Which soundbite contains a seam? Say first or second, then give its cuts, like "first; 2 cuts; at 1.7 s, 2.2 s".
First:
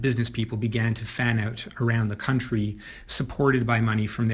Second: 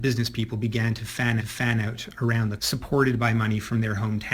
second; 2 cuts; at 1.4 s, 2.6 s